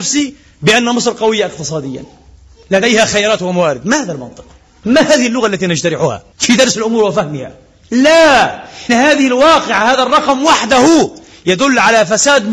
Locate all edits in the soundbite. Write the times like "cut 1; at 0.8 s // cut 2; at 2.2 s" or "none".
cut 1; at 6.3 s // cut 2; at 8.9 s